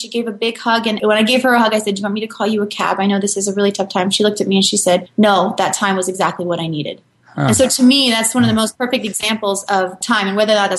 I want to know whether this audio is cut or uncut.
uncut